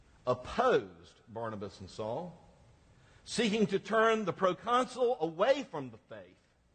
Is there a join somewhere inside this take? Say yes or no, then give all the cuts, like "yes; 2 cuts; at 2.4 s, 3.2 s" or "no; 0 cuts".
no; 0 cuts